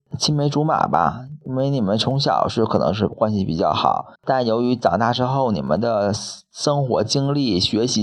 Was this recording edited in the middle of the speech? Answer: yes; 1 cut; at 4.1 s

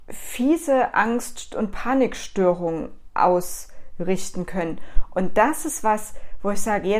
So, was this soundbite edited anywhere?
no; 0 cuts

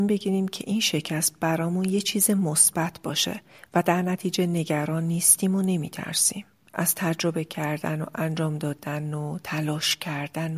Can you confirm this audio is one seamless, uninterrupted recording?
yes; 0 cuts

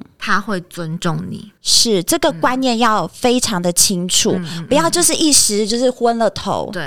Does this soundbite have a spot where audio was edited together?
yes; 1 cut; at 1.6 s

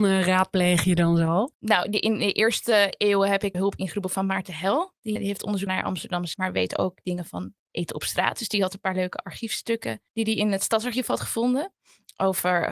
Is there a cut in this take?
yes; 6 cuts; at 1.5 s, 3.5 s, 5.2 s, 5.7 s, 6.3 s, 10.1 s

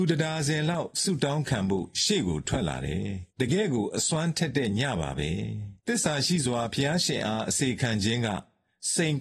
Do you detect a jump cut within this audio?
yes; 2 cuts; at 3.3 s, 5.8 s

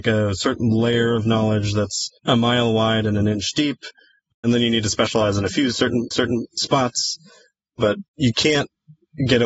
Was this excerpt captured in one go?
no; 2 cuts; at 2.2 s, 6.1 s

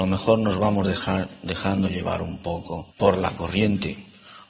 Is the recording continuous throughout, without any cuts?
no; 1 cut; at 2.9 s

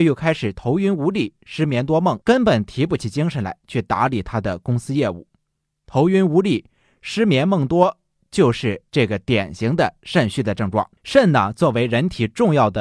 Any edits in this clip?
yes; 3 cuts; at 2.2 s, 8.9 s, 11.0 s

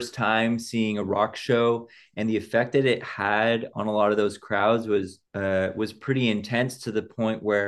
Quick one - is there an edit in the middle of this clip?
yes; 2 cuts; at 3.7 s, 5.3 s

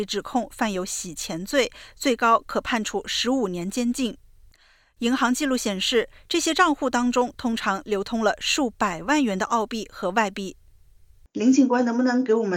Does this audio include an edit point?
no; 0 cuts

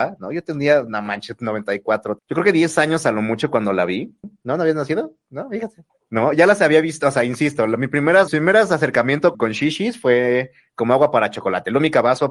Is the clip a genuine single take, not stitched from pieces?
no; 3 cuts; at 2.2 s, 8.3 s, 9.3 s

